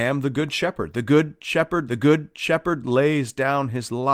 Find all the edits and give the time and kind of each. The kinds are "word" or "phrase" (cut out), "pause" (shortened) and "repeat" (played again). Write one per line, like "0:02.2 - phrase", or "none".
0:01.9 - repeat